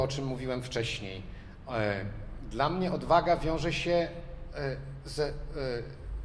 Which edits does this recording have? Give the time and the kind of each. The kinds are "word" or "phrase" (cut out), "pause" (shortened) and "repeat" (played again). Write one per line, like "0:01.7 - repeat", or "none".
none